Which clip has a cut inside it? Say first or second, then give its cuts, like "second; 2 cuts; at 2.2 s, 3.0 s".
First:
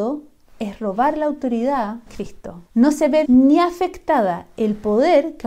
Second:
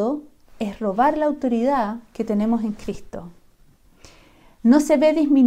first; 3 cuts; at 2.1 s, 2.7 s, 3.3 s